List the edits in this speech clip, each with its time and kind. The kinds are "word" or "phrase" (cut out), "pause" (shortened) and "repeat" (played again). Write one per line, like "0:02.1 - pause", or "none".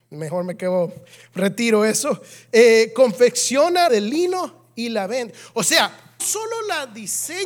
0:03.9 - word
0:06.2 - word